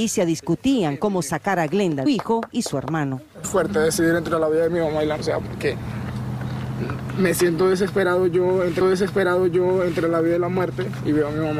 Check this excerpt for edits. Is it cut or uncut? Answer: cut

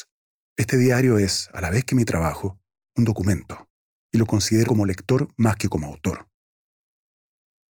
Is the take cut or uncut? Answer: cut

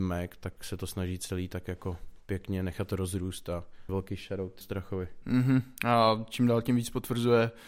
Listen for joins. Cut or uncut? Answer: cut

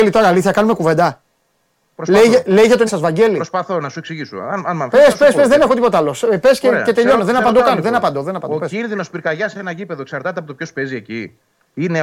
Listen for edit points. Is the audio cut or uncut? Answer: cut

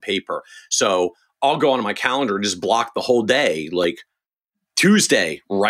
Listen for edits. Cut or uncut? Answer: uncut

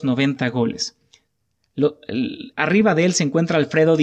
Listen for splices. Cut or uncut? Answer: uncut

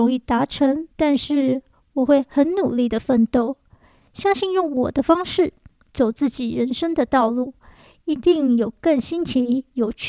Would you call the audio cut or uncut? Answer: cut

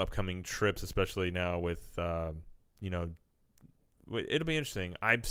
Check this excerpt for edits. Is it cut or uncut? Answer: uncut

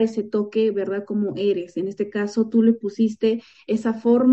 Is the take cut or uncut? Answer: uncut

